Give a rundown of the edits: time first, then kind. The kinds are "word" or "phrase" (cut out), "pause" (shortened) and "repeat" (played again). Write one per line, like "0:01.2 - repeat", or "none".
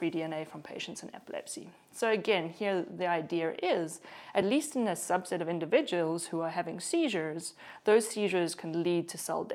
none